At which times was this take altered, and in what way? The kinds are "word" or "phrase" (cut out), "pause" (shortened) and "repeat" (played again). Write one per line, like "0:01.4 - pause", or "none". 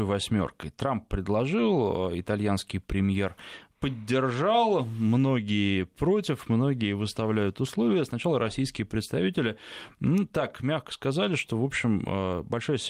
none